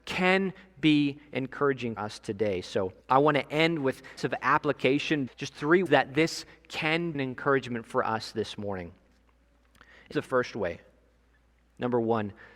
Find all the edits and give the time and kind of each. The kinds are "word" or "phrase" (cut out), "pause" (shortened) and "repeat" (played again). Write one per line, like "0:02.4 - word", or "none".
0:02.0 - word
0:03.0 - pause
0:04.2 - phrase
0:05.3 - phrase
0:05.9 - word
0:07.1 - word
0:10.1 - word